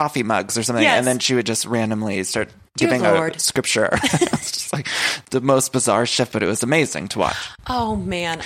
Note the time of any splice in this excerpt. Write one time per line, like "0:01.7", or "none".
none